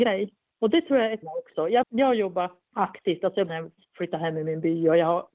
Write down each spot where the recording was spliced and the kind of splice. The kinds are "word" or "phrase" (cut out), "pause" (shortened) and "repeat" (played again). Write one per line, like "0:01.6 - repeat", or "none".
0:01.2 - word
0:01.8 - word
0:03.5 - word